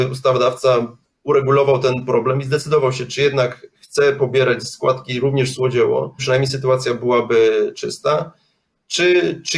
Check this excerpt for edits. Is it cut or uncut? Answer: cut